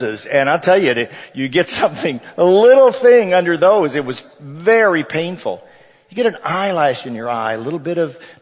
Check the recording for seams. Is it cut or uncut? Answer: uncut